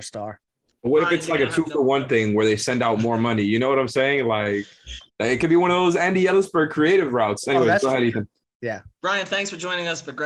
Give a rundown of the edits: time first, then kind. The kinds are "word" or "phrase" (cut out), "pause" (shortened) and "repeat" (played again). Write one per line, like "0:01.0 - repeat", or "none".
0:05.1 - pause
0:08.9 - pause